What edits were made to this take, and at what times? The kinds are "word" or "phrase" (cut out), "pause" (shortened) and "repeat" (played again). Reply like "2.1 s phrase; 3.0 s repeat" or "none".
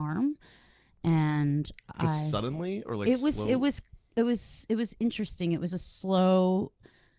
none